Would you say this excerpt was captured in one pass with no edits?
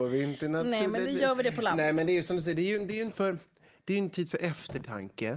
no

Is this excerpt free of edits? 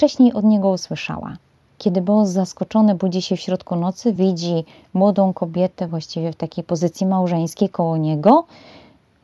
yes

